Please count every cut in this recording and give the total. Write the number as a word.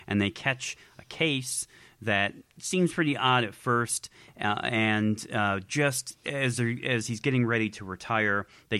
zero